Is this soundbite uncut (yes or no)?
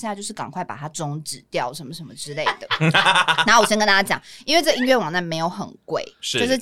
yes